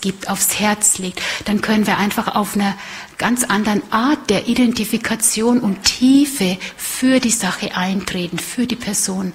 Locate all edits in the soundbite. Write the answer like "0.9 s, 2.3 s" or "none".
none